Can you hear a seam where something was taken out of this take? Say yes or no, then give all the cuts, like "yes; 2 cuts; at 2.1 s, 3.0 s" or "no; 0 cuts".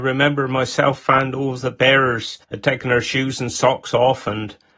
yes; 1 cut; at 2.4 s